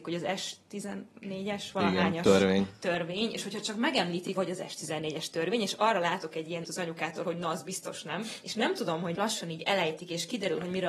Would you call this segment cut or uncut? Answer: cut